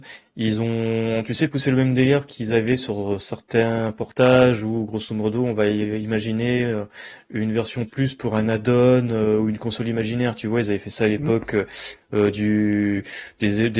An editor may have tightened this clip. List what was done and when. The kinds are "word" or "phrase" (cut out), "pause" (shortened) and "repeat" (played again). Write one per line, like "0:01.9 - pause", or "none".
0:07.9 - word

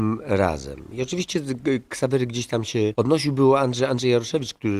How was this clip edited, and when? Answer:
none

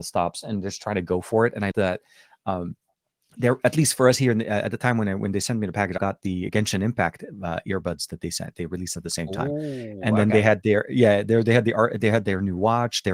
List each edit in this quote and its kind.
0:01.7 - word
0:06.0 - word
0:06.5 - word

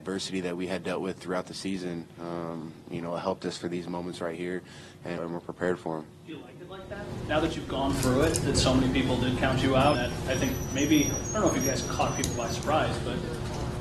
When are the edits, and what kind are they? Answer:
0:05.2 - word
0:09.9 - word

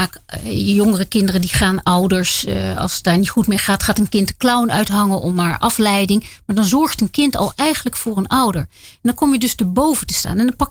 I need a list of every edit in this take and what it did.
none

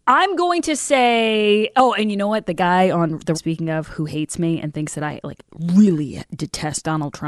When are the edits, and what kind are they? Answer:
0:03.3 - phrase

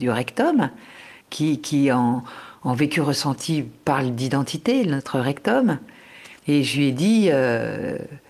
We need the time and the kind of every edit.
0:01.2 - pause
0:06.4 - pause

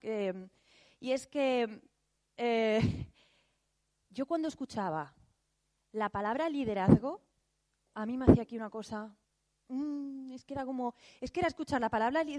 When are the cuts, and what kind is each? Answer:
none

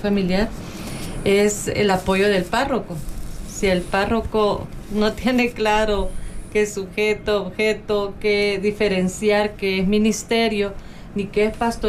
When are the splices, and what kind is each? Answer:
none

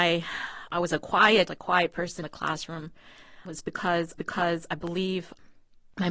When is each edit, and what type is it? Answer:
0:01.5 - word
0:02.2 - word
0:03.5 - word
0:04.2 - repeat

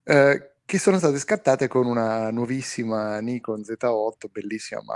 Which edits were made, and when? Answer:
none

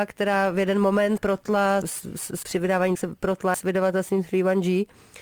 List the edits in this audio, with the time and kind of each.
0:01.2 - word
0:01.8 - word
0:02.4 - word
0:02.9 - word
0:03.5 - word

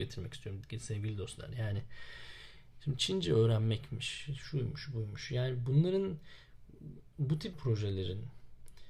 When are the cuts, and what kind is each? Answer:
0:07.5 - word

